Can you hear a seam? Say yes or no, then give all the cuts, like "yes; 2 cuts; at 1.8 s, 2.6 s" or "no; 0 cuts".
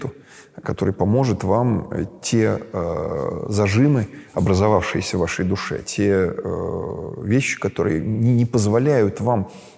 no; 0 cuts